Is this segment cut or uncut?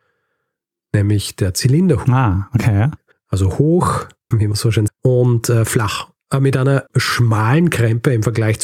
cut